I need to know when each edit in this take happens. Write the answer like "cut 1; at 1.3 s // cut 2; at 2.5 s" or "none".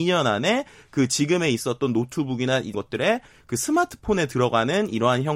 cut 1; at 2.7 s